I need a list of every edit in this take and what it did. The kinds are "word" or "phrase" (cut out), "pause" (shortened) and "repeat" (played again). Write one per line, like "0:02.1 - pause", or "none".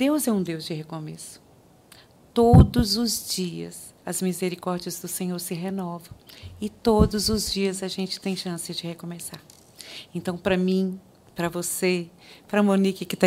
none